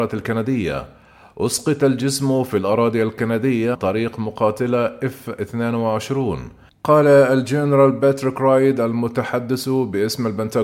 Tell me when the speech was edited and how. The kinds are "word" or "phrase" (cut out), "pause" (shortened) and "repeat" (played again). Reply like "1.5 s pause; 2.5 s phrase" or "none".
3.7 s word